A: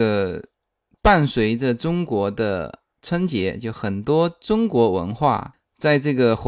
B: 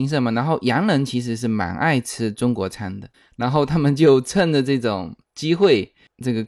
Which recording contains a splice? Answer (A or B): B